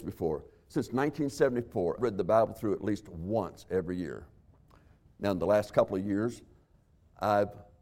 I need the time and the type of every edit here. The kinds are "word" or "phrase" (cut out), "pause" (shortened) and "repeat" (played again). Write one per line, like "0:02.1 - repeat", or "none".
0:02.0 - word